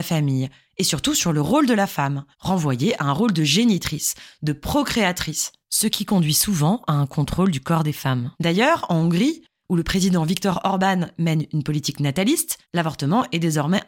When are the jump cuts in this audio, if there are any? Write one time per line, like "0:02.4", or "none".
0:02.3
0:05.6
0:08.3
0:12.6